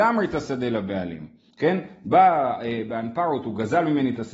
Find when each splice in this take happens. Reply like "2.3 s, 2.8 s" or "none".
1.5 s